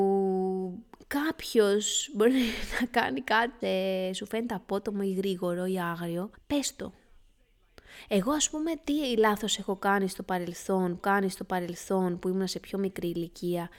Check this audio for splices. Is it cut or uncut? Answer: cut